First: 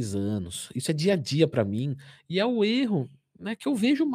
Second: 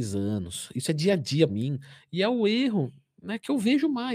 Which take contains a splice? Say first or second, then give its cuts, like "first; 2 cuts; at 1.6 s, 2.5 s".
second; 1 cut; at 1.5 s